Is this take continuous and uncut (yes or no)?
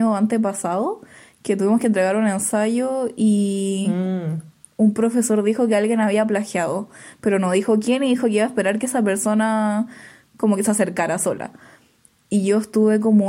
yes